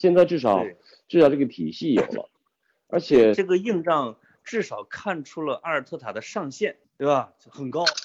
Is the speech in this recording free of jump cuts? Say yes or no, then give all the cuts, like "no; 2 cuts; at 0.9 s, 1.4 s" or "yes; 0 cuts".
no; 1 cut; at 6.8 s